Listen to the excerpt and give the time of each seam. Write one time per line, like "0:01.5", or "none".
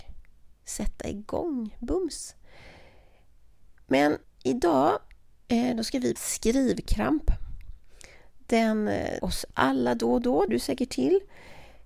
0:04.2
0:06.2
0:09.2
0:10.5

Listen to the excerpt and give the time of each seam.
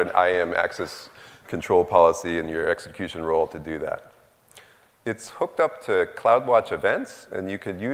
none

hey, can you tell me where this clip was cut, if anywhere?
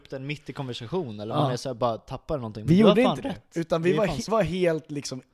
0:04.3

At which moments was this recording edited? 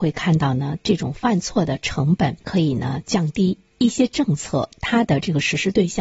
0:02.4

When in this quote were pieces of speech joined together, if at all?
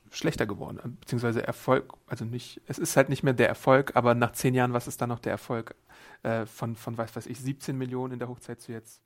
none

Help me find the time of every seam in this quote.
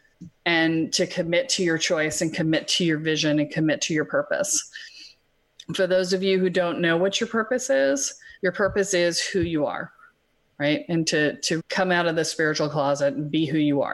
0:08.4
0:11.6

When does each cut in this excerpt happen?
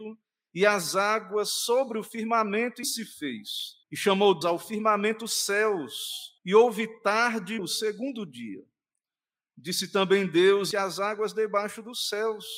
0:02.8
0:03.8
0:04.4
0:06.4
0:07.6
0:10.7

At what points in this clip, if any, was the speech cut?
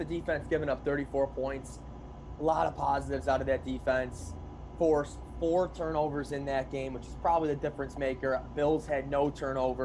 none

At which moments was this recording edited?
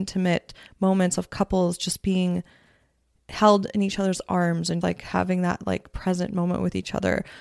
0:04.8

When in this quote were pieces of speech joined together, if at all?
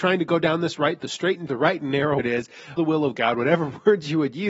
0:01.0
0:01.5
0:02.2
0:02.8

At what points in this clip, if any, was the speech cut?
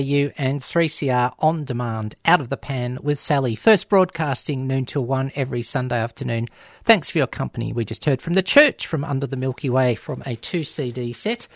none

